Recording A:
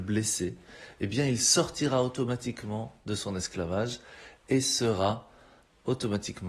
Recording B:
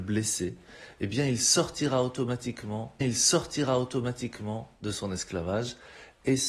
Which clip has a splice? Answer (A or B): B